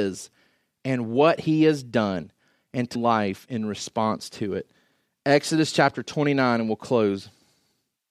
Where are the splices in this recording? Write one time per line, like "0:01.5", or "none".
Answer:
0:03.0